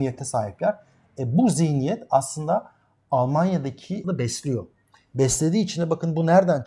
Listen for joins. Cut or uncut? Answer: cut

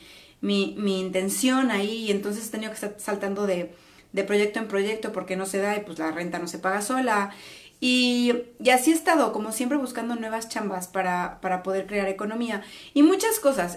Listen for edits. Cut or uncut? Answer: uncut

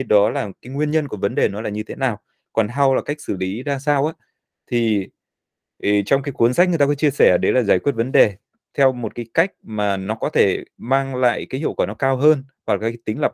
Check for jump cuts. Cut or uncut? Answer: uncut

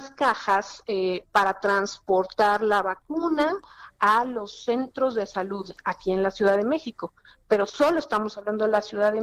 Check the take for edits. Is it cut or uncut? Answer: uncut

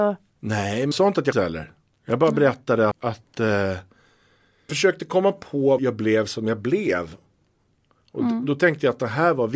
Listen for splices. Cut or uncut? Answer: cut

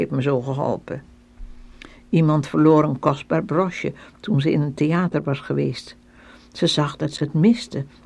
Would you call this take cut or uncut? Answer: uncut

